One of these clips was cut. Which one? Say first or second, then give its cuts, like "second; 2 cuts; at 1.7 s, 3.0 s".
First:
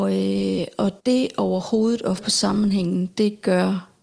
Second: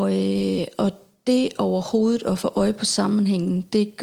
first; 2 cuts; at 1.0 s, 2.2 s